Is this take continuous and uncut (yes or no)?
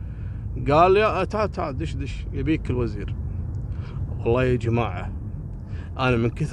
yes